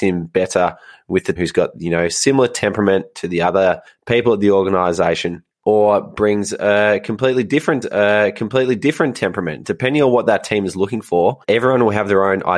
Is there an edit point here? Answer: yes; 5 cuts; at 1.4 s, 3.9 s, 5.5 s, 7.8 s, 11.4 s

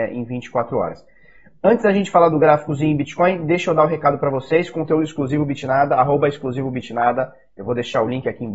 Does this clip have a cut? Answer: no; 0 cuts

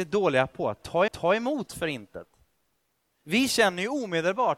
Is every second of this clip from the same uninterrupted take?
no; 1 cut; at 1.1 s

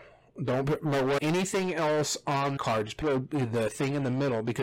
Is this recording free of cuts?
no; 3 cuts; at 1.2 s, 2.6 s, 3.0 s

